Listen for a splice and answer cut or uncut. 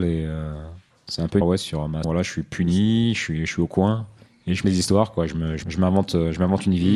cut